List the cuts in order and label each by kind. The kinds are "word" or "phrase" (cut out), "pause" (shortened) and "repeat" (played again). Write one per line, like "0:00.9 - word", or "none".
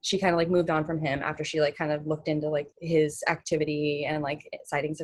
0:02.7 - pause